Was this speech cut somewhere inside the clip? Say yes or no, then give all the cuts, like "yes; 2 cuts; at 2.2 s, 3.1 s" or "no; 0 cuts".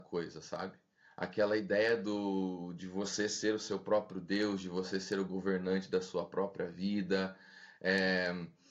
no; 0 cuts